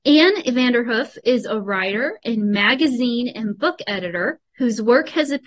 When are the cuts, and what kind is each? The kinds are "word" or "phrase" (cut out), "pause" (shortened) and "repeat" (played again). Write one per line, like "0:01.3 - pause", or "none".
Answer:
0:04.5 - pause